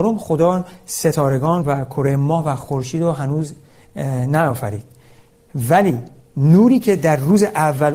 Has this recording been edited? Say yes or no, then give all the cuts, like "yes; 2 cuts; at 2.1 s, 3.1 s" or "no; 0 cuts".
no; 0 cuts